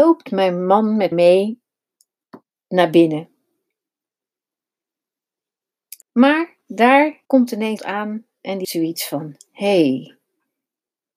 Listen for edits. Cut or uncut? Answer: cut